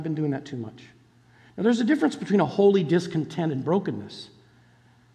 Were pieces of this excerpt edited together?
no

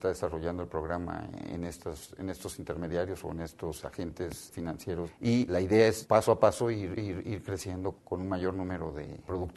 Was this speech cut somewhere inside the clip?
yes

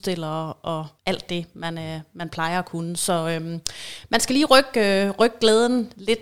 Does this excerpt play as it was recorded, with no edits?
no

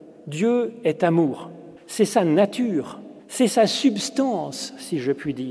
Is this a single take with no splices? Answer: no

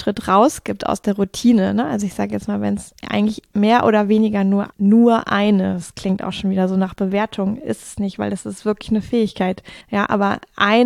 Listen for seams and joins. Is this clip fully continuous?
no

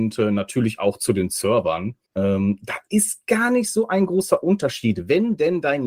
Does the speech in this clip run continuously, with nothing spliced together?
no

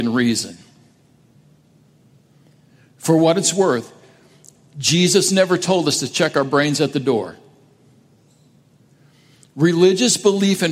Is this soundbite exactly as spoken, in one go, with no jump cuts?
yes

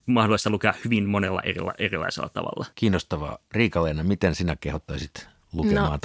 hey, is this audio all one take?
no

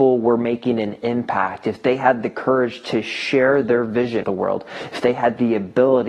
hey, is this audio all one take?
no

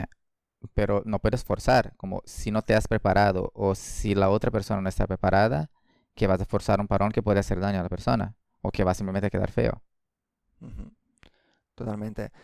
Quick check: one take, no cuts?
yes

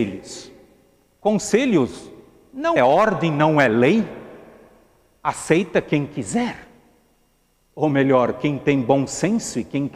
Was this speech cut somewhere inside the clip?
yes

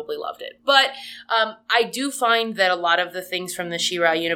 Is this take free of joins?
yes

